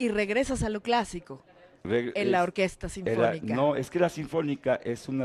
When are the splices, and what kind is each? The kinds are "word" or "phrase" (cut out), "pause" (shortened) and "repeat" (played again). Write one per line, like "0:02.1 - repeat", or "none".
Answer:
none